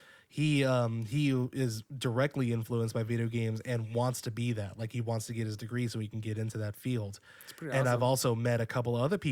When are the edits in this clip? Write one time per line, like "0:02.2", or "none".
none